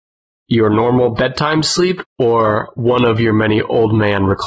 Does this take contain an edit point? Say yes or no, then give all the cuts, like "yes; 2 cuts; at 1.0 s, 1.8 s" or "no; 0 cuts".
no; 0 cuts